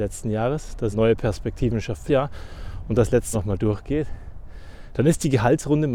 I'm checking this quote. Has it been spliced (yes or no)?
yes